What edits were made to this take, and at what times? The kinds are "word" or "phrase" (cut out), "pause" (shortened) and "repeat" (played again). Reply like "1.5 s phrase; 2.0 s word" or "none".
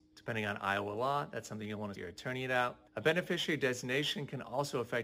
2.0 s phrase; 2.9 s pause